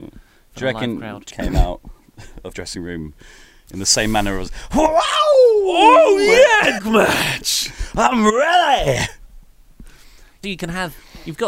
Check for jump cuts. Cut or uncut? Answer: cut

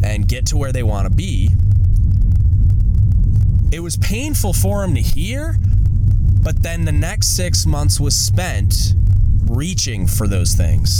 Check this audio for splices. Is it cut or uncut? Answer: uncut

